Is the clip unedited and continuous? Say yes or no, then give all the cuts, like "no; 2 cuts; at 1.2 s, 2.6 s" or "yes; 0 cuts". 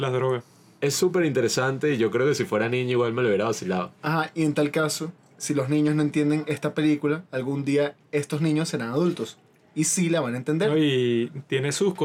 yes; 0 cuts